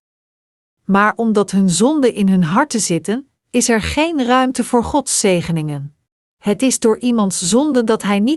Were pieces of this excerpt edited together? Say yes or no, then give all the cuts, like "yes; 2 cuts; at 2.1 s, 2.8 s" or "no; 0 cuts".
yes; 1 cut; at 6.1 s